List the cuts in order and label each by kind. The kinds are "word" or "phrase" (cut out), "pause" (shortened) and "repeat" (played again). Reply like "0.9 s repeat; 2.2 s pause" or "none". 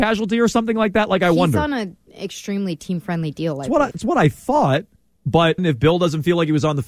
3.9 s word; 5.6 s word